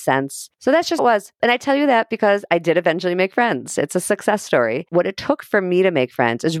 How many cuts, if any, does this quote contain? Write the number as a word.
one